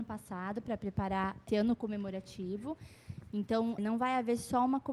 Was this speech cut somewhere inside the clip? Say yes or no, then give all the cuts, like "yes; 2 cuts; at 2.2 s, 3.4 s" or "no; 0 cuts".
yes; 2 cuts; at 1.5 s, 3.8 s